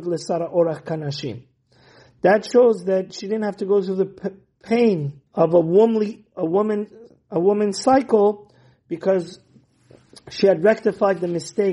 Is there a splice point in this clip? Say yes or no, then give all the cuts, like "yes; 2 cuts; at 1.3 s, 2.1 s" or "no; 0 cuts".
yes; 1 cut; at 5.3 s